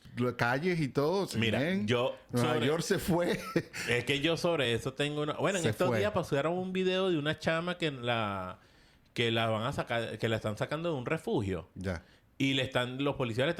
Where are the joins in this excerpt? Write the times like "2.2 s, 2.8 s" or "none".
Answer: none